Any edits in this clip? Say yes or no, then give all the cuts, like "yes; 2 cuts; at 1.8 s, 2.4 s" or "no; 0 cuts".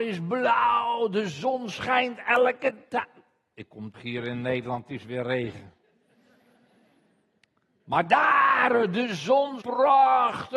yes; 2 cuts; at 3.9 s, 9.6 s